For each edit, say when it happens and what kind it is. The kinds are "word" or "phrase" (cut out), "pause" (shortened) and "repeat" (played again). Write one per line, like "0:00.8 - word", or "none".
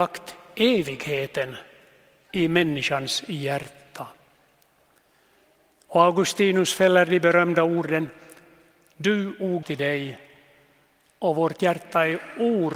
0:09.6 - phrase